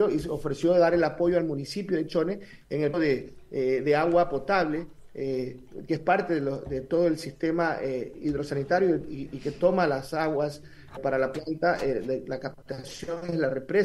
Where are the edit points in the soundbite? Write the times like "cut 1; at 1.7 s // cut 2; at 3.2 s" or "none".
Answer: cut 1; at 2.9 s // cut 2; at 11.0 s